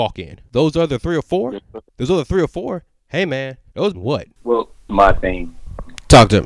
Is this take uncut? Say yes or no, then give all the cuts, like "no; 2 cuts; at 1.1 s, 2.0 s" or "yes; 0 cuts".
no; 3 cuts; at 1.9 s, 3.9 s, 4.9 s